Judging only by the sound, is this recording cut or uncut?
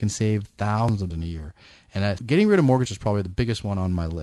cut